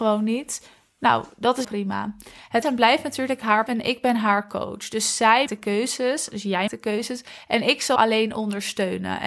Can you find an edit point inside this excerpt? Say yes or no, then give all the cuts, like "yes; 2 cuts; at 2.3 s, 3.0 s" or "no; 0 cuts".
yes; 6 cuts; at 1.6 s, 2.6 s, 3.7 s, 5.5 s, 6.7 s, 8.0 s